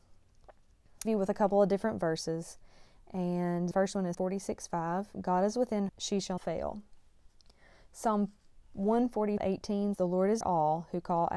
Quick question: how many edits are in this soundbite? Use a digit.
8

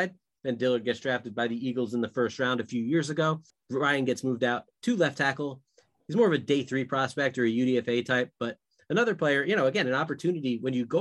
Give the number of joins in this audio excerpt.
1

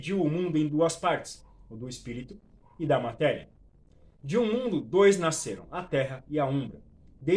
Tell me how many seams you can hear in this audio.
0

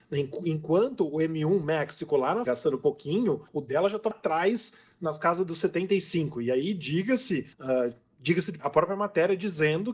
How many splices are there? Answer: 5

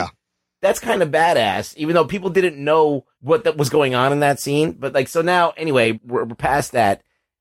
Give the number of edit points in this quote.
2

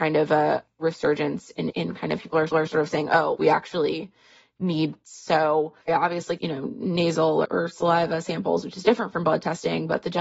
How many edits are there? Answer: 8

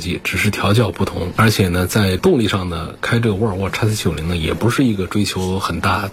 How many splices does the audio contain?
0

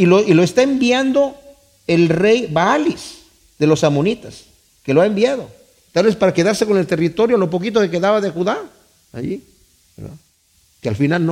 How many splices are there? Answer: 0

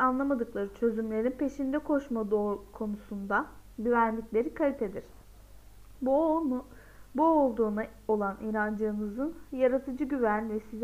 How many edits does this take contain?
0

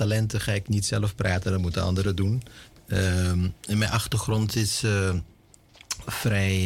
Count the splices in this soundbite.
0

